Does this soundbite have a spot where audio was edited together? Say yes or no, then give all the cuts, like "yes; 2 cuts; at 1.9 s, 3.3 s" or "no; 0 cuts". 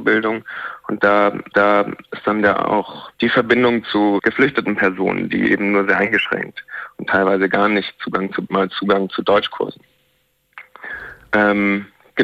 yes; 4 cuts; at 1.5 s, 3.2 s, 4.2 s, 8.5 s